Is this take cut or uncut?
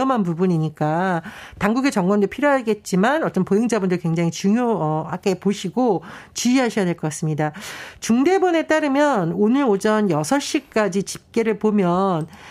uncut